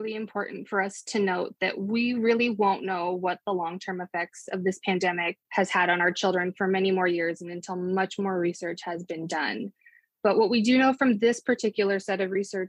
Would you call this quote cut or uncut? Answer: uncut